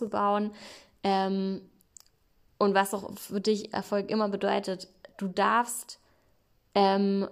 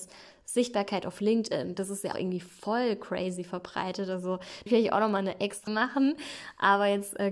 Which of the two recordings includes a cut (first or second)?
second